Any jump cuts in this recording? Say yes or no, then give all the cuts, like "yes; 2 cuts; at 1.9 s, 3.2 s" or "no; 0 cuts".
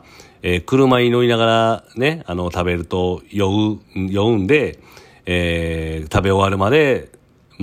yes; 1 cut; at 3.8 s